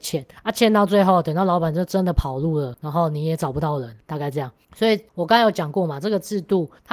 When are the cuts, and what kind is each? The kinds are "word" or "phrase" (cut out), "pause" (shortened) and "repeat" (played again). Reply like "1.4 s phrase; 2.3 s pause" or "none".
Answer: 5.1 s pause